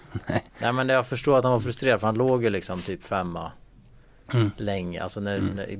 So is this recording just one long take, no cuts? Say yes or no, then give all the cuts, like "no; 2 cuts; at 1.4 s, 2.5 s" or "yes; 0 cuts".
yes; 0 cuts